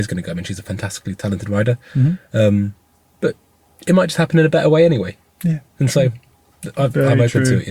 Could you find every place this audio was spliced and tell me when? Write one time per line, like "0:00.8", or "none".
none

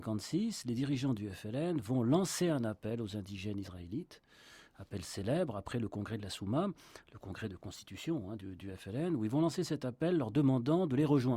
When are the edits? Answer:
none

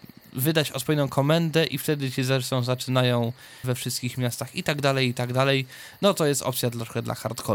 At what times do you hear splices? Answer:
0:03.6

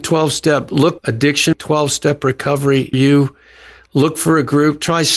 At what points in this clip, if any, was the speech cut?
0:01.0
0:01.5
0:02.9

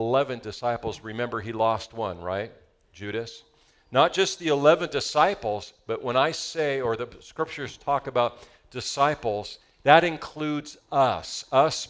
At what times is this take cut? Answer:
none

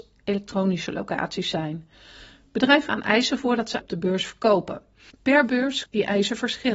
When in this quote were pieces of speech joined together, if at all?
0:02.9
0:03.4
0:03.8
0:05.9

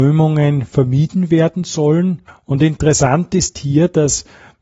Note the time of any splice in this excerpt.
0:02.3

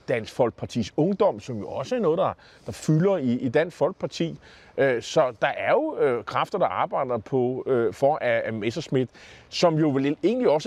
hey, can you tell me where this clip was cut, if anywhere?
none

